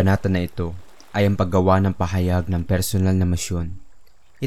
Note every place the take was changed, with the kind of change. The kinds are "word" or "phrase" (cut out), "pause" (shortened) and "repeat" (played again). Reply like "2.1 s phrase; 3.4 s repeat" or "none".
none